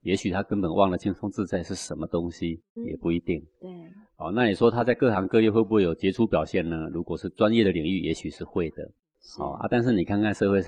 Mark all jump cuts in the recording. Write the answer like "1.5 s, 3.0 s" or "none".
2.8 s